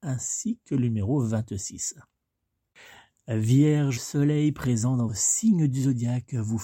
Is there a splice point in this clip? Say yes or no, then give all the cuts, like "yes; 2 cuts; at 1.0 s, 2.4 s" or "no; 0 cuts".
yes; 2 cuts; at 4.0 s, 5.1 s